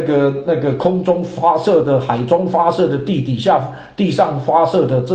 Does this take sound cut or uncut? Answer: uncut